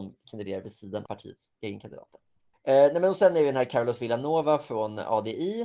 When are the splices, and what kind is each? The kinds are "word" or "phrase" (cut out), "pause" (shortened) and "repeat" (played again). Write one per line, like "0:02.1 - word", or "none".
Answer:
0:01.1 - word